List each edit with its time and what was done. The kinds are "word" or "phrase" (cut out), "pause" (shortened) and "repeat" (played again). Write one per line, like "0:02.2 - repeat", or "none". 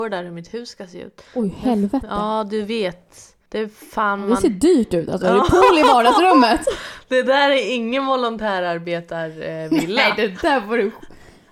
0:01.3 - pause
0:03.5 - pause